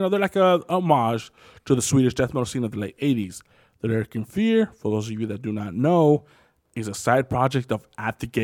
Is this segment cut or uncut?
uncut